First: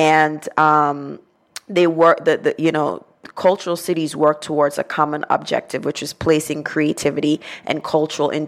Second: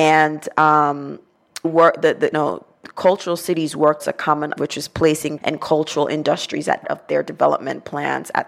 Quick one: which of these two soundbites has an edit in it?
second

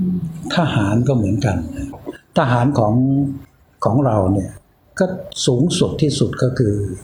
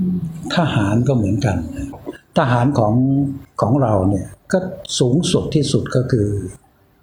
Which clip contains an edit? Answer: second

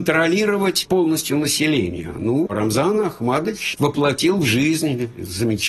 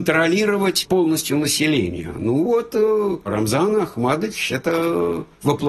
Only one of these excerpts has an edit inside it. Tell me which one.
first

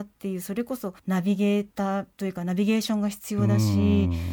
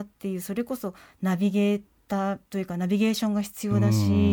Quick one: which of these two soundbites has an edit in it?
first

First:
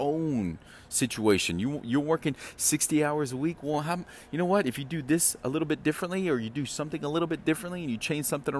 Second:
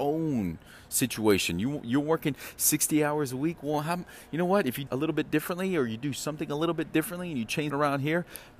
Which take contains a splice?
second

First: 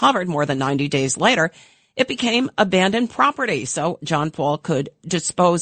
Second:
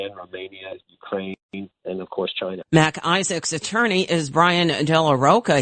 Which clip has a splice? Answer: second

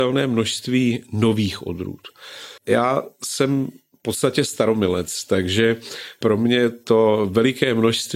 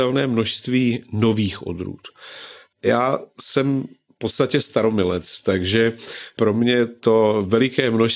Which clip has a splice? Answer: first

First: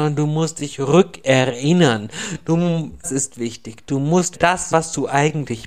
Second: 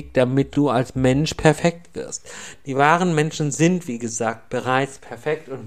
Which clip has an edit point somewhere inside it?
first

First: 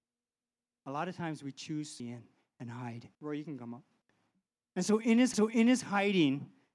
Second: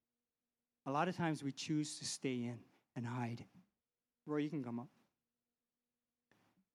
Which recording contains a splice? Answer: first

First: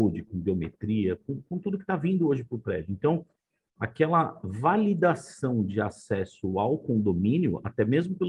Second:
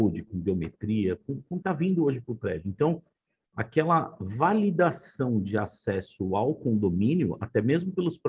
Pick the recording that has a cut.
second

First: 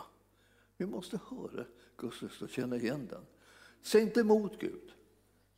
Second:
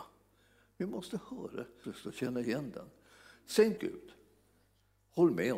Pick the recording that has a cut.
second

